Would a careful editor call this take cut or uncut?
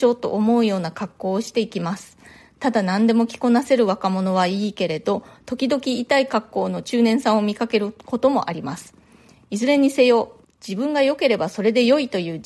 uncut